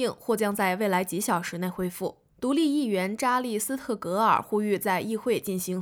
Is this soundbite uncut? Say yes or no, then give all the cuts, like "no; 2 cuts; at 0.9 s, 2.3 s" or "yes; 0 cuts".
no; 1 cut; at 2.3 s